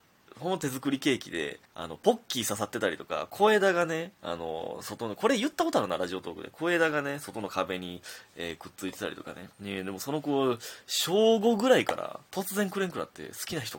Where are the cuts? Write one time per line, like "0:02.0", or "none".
0:01.6
0:04.2
0:09.5
0:12.3